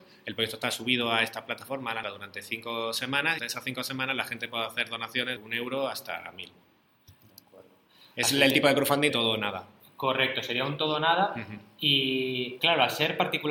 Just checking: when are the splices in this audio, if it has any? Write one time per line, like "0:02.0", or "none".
0:02.0
0:03.4
0:05.4
0:09.1
0:12.6

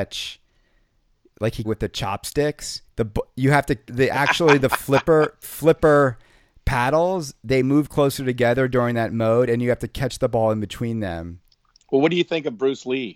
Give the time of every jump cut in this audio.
0:01.6
0:02.9
0:03.9
0:05.4
0:11.7

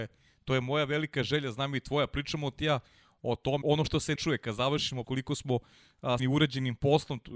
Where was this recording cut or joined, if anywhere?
0:03.6
0:04.2
0:05.0
0:06.2

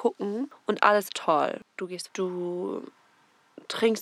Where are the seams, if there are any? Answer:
0:01.1
0:02.1

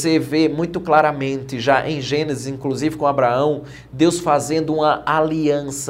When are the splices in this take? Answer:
none

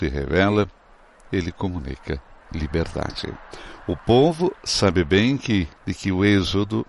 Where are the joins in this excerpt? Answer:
0:02.4
0:05.8

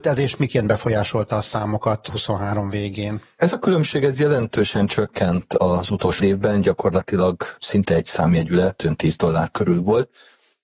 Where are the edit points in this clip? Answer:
0:06.2

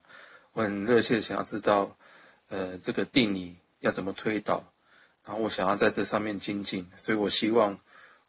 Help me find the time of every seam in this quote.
none

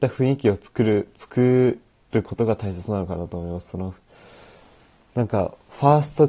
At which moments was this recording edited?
none

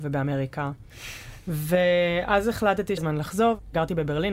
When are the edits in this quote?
0:03.0

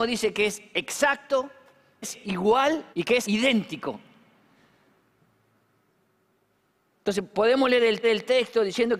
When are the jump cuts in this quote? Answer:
0:02.0
0:02.9
0:03.2
0:07.3
0:08.0

